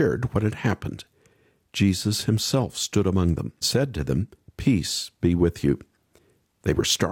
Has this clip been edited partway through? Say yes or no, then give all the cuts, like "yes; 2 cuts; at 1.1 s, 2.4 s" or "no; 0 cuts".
yes; 1 cut; at 3.6 s